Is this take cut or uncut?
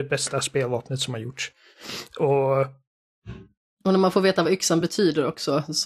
uncut